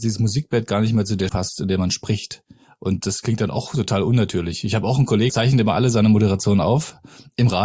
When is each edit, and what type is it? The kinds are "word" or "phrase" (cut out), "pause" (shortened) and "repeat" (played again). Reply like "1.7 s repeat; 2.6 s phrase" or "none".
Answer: 1.3 s word; 3.0 s word; 5.3 s word